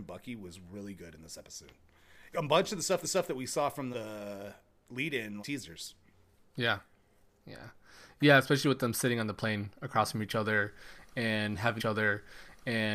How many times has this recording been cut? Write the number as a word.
five